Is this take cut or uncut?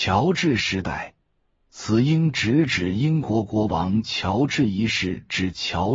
uncut